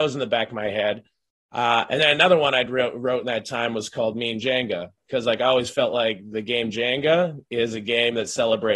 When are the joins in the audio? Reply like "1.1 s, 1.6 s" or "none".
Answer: none